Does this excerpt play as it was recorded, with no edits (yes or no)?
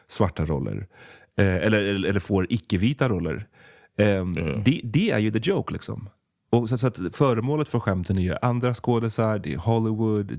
yes